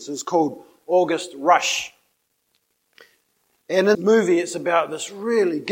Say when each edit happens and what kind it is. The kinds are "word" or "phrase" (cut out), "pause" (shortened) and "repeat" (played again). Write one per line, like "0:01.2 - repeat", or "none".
0:03.9 - word

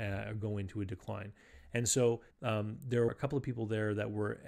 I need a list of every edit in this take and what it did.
0:02.3 - pause
0:03.1 - word

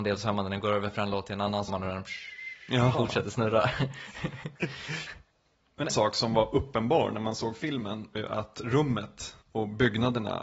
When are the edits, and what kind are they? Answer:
0:01.7 - word
0:02.9 - word
0:04.6 - pause
0:05.9 - word
0:08.1 - word
0:09.4 - pause

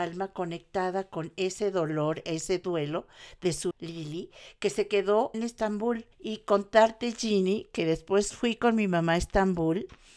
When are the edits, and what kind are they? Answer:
0:03.7 - word
0:05.3 - word
0:06.1 - pause

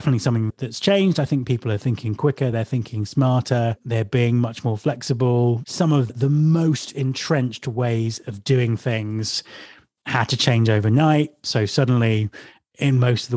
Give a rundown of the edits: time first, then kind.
none

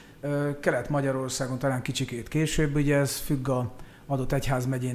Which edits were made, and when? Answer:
none

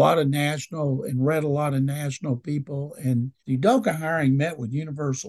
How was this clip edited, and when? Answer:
0:03.4 - pause

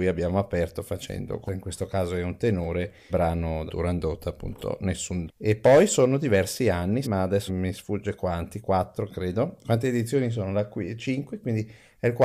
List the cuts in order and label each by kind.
0:01.5 - word
0:03.1 - word
0:03.7 - word
0:05.3 - word
0:07.0 - word
0:07.5 - word

